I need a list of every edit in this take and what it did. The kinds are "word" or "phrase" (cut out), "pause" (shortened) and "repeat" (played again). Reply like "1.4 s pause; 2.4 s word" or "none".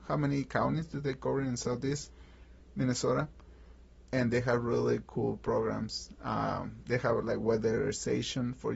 none